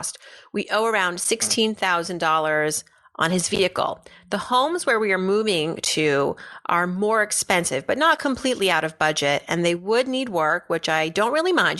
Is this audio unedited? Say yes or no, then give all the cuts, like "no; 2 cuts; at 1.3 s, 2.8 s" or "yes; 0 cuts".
yes; 0 cuts